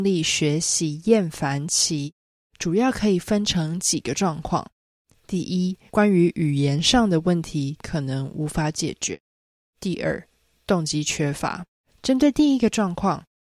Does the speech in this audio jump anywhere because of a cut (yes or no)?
yes